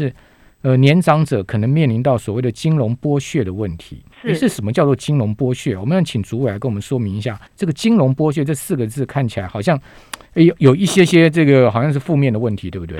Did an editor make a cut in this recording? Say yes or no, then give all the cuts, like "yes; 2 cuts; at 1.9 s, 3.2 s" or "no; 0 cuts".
yes; 3 cuts; at 4.1 s, 7.5 s, 10.2 s